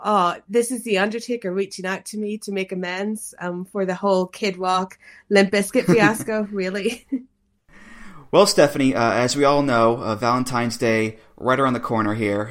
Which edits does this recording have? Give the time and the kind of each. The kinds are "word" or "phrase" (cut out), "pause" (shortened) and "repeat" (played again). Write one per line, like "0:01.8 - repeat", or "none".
none